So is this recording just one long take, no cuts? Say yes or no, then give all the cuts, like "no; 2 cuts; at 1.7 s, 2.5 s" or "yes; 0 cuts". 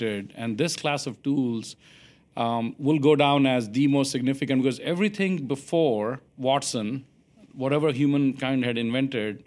no; 1 cut; at 6.3 s